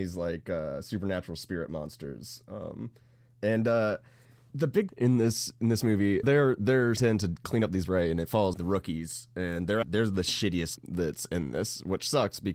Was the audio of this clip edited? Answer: yes; 8 cuts; at 4.5 s, 4.9 s, 6.2 s, 7.0 s, 7.8 s, 8.5 s, 9.8 s, 10.8 s

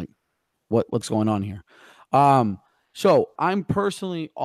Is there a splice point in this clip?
yes; 2 cuts; at 1.0 s, 3.4 s

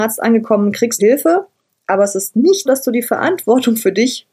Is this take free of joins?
no; 2 cuts; at 1.0 s, 2.7 s

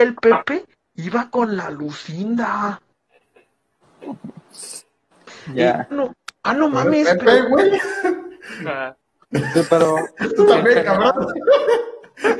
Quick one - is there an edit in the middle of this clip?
yes; 2 cuts; at 5.9 s, 9.0 s

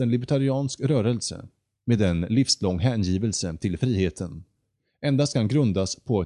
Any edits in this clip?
no; 0 cuts

